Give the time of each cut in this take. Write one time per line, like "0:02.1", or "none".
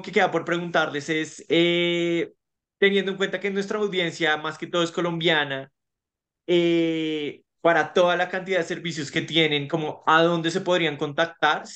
none

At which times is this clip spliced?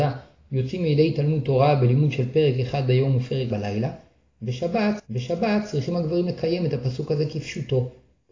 0:03.5
0:05.0

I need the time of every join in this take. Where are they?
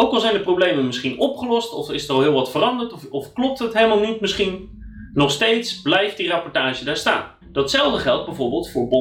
0:07.4

